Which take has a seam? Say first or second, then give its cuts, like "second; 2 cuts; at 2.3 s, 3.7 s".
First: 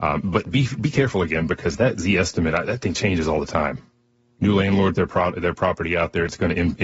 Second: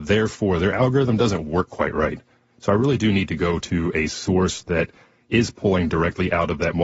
first; 2 cuts; at 4.2 s, 5.0 s